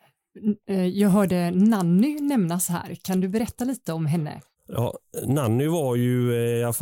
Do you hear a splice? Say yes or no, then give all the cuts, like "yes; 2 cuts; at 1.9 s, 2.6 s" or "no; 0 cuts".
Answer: no; 0 cuts